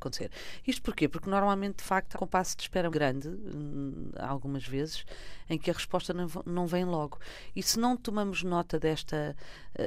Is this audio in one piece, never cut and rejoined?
no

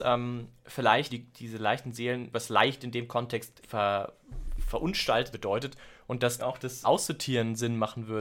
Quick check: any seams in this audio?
yes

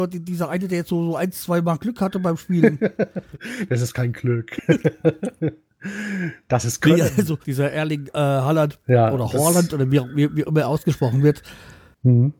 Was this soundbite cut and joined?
yes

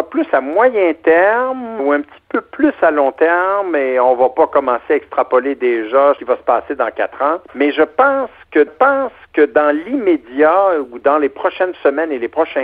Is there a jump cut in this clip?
yes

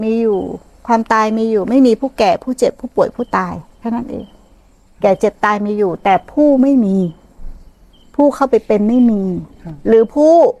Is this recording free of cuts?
yes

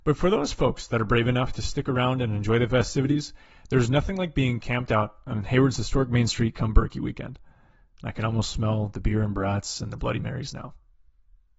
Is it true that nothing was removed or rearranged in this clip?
yes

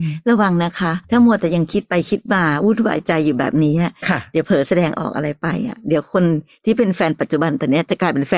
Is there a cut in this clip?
yes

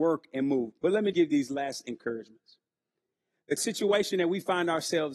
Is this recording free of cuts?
no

